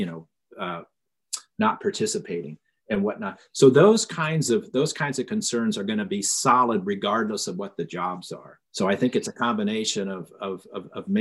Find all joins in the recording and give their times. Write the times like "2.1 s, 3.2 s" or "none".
8.6 s